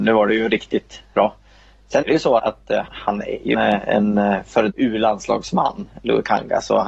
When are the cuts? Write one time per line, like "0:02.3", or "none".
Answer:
0:01.1
0:02.0
0:02.4
0:02.9
0:03.5
0:04.7